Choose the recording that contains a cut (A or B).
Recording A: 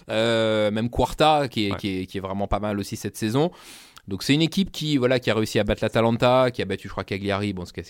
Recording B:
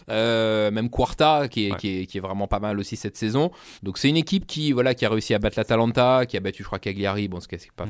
B